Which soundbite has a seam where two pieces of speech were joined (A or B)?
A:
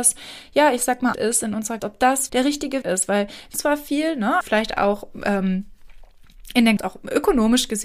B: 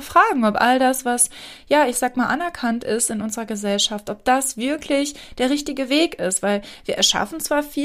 A